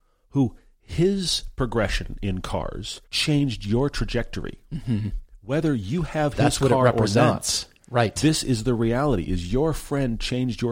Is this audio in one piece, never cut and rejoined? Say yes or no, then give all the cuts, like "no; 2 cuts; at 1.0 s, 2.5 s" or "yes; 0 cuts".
no; 1 cut; at 3.0 s